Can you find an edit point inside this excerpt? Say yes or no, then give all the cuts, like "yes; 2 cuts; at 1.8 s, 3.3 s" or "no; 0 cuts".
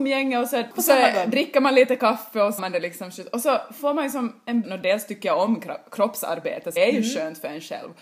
yes; 3 cuts; at 2.6 s, 4.6 s, 6.8 s